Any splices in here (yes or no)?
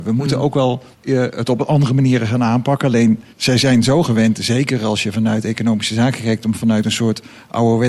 yes